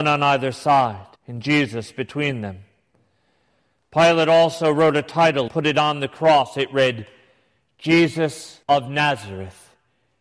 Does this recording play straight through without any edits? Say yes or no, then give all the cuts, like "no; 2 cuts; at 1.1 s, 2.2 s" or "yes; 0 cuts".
no; 3 cuts; at 1.2 s, 5.5 s, 8.6 s